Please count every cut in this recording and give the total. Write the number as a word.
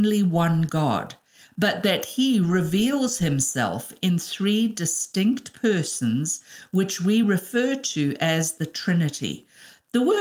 zero